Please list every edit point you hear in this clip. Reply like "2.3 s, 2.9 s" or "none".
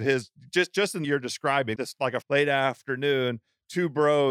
1.0 s, 1.7 s, 2.2 s